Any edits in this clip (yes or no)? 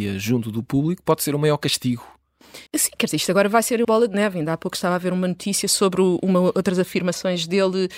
yes